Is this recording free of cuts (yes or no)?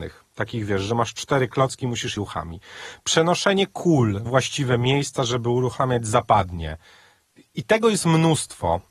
no